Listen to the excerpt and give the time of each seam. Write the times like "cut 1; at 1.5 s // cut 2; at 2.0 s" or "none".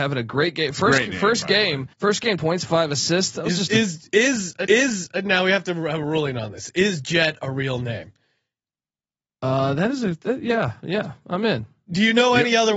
cut 1; at 1.9 s // cut 2; at 2.4 s // cut 3; at 4.7 s